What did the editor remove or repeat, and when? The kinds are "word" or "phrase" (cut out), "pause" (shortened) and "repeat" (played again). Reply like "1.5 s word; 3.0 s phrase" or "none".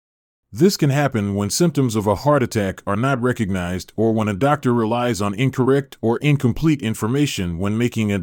none